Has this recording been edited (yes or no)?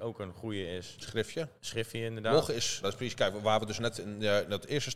yes